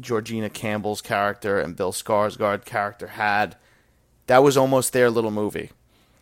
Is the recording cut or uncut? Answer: uncut